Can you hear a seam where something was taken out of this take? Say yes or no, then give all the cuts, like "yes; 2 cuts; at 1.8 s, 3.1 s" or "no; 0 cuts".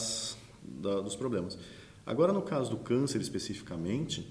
no; 0 cuts